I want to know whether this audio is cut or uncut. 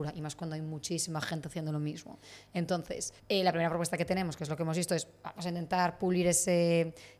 cut